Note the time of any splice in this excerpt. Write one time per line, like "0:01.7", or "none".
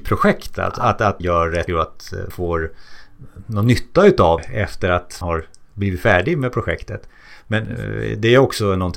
0:01.2
0:01.7
0:02.3
0:04.4
0:05.2